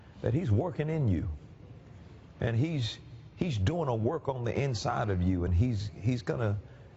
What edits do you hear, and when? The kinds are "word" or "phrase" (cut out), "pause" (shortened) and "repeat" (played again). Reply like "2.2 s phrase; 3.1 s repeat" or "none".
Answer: none